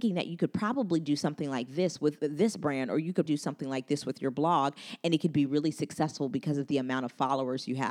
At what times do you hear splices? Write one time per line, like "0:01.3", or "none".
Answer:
0:03.3